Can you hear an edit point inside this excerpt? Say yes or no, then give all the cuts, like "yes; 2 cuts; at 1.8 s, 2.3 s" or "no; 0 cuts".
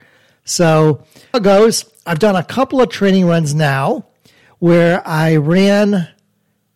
yes; 1 cut; at 1.3 s